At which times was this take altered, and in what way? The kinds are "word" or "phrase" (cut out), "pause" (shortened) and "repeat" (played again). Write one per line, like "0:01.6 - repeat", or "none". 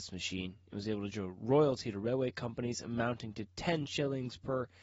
0:01.1 - word